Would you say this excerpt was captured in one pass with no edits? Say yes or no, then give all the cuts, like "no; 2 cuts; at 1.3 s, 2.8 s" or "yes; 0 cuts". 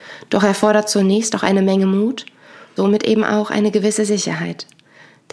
no; 1 cut; at 2.8 s